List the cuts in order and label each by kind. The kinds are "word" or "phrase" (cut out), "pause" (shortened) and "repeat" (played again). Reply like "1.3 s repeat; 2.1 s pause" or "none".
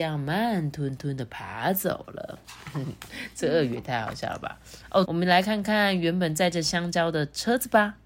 5.0 s phrase